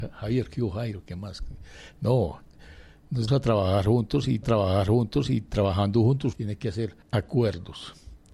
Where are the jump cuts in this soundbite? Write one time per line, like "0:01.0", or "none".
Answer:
0:03.3
0:04.4
0:06.3
0:07.0